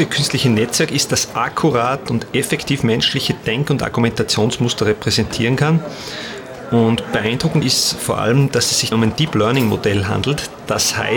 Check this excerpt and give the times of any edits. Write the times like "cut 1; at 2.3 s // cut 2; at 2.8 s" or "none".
cut 1; at 7.6 s // cut 2; at 8.9 s